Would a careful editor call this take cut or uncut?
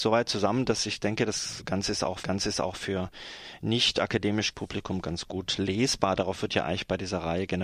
cut